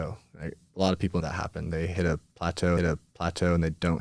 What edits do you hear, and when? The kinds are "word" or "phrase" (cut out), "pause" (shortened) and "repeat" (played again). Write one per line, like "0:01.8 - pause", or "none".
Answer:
0:01.2 - phrase
0:02.8 - repeat